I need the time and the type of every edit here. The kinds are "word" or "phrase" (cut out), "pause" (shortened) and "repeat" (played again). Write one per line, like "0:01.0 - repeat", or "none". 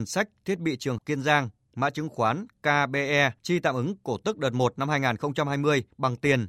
0:01.0 - word
0:03.4 - pause